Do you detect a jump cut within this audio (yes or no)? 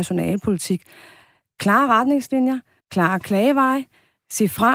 yes